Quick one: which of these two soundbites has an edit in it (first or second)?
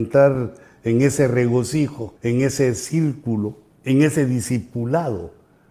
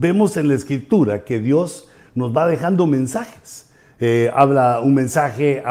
first